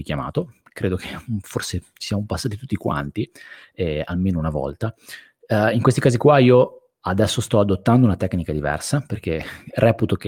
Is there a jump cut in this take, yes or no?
no